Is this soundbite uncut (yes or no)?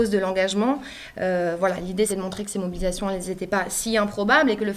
no